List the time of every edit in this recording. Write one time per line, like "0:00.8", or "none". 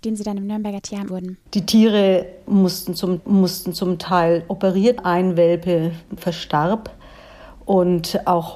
0:01.1
0:01.5
0:03.2
0:05.0